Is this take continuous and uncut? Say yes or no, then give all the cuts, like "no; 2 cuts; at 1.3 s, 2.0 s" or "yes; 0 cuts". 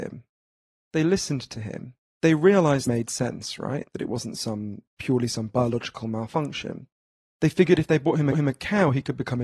no; 4 cuts; at 2.0 s, 2.9 s, 4.9 s, 8.3 s